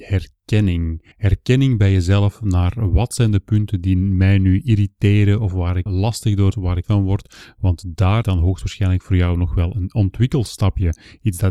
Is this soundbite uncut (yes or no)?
no